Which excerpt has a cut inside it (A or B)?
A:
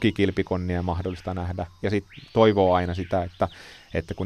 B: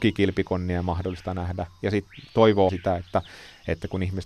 B